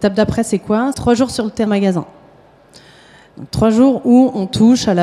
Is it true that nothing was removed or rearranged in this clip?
no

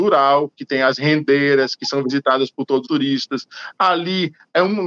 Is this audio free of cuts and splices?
no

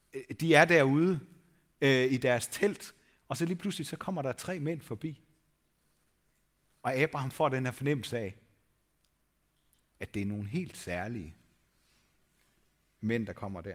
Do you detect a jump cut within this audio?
no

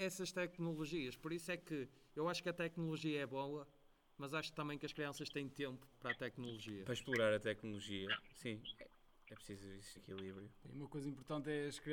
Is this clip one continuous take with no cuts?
no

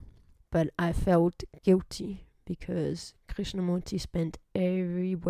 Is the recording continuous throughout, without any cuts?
yes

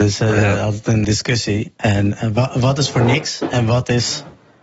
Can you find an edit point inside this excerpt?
yes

